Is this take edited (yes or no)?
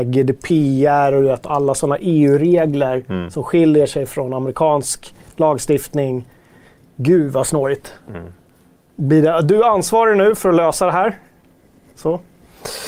no